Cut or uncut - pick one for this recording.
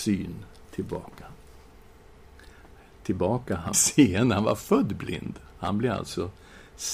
cut